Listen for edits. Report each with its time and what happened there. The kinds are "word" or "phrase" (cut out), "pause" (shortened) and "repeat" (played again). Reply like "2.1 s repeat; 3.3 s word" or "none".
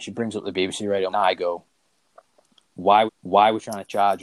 1.1 s phrase; 3.1 s repeat

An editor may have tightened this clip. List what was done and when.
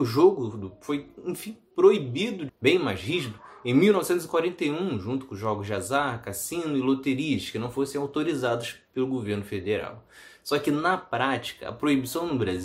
2.5 s phrase

